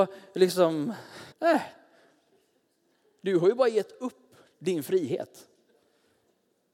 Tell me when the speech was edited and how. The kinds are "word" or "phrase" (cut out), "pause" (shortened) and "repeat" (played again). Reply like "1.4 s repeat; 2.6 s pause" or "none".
1.3 s pause